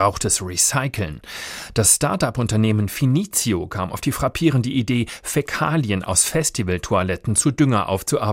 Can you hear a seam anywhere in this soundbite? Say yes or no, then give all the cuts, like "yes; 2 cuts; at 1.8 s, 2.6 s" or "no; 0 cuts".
no; 0 cuts